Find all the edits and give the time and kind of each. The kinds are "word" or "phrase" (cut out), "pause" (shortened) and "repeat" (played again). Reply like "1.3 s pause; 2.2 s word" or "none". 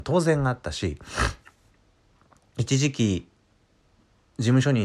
none